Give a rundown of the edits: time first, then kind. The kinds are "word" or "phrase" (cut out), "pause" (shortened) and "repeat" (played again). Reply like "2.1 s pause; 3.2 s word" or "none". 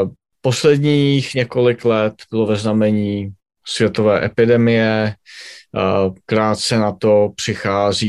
none